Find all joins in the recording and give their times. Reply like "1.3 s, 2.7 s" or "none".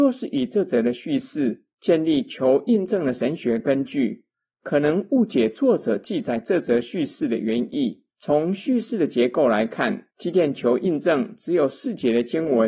8.1 s, 10.1 s